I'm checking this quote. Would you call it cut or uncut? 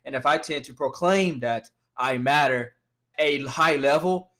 cut